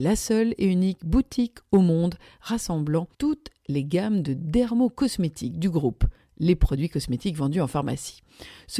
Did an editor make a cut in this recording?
yes; 1 cut; at 3.1 s

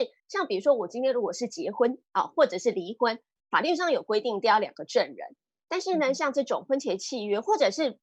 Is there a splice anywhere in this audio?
no; 0 cuts

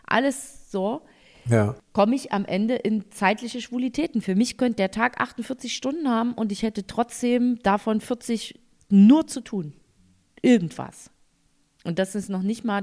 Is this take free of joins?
yes; 0 cuts

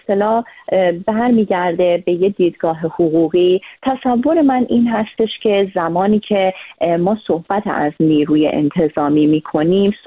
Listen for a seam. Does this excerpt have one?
no; 0 cuts

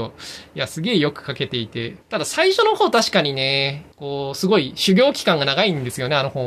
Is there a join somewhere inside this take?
yes; 2 cuts; at 2.0 s, 3.9 s

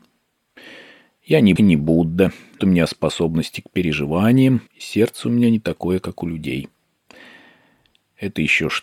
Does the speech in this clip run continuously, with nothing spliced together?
no; 3 cuts; at 1.6 s, 2.6 s, 4.7 s

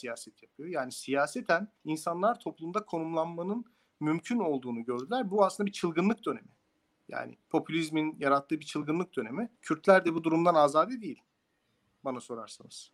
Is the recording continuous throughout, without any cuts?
no; 3 cuts; at 1.8 s, 7.4 s, 9.5 s

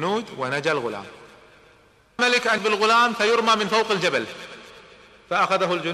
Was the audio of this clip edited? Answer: yes; 2 cuts; at 2.2 s, 2.6 s

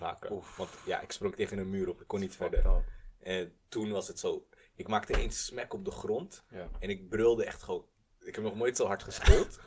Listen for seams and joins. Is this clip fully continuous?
yes; 0 cuts

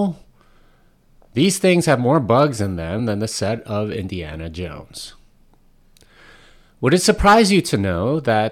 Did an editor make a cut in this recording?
no; 0 cuts

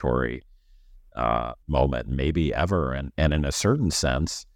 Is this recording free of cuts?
no; 1 cut; at 1.6 s

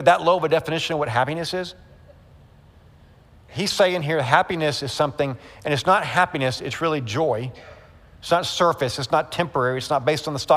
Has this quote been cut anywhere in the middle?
no; 0 cuts

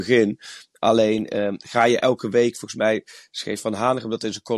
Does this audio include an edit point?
no; 0 cuts

